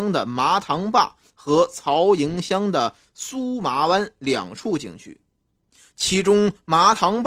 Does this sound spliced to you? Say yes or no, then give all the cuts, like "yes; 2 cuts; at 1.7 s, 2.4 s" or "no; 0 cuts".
no; 0 cuts